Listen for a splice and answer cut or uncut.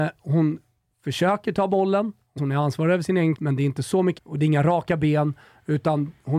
cut